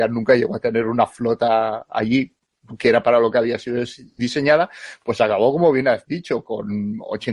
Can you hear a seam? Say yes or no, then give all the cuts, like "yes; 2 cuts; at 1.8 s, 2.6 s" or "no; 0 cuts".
no; 0 cuts